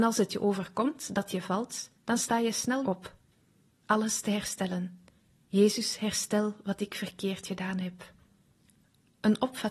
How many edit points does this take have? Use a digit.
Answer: 4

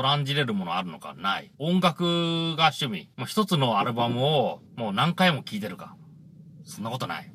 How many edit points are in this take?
3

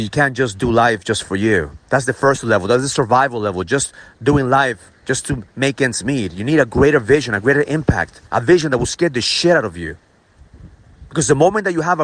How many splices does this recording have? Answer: 2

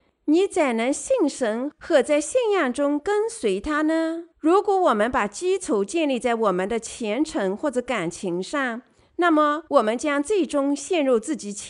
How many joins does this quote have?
2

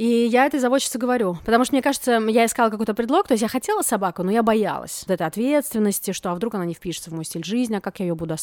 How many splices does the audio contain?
1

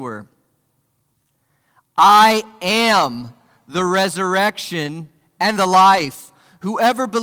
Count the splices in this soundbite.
0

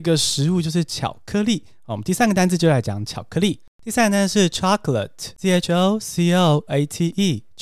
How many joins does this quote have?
3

